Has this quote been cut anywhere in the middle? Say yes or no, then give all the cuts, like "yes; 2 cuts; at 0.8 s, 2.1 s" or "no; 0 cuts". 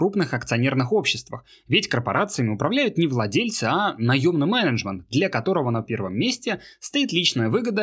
no; 0 cuts